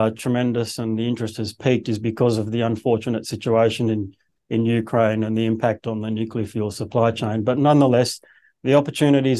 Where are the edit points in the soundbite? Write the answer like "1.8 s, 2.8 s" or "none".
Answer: none